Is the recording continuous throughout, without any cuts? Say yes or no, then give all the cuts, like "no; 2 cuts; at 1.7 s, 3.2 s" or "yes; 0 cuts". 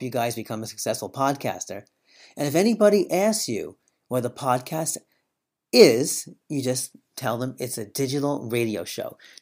yes; 0 cuts